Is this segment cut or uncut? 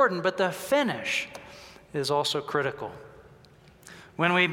uncut